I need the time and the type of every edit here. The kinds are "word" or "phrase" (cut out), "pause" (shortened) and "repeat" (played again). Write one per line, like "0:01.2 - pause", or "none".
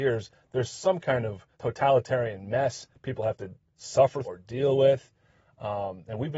0:01.5 - pause
0:04.2 - word